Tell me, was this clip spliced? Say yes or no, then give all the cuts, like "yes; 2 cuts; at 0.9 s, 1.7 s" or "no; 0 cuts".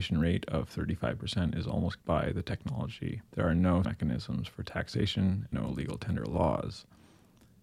yes; 4 cuts; at 2.0 s, 3.3 s, 3.8 s, 5.5 s